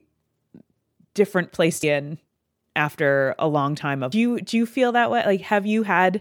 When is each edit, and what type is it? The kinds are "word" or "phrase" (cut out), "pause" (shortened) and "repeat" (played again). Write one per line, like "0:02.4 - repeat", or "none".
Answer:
0:01.8 - word
0:04.1 - phrase